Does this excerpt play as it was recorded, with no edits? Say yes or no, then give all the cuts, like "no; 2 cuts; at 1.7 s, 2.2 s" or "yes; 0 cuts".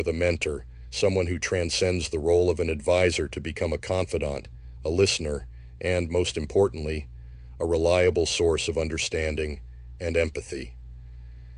yes; 0 cuts